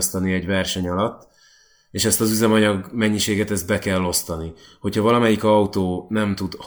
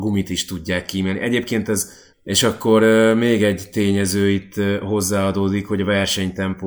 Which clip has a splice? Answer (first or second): second